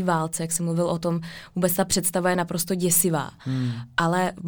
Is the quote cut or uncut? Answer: uncut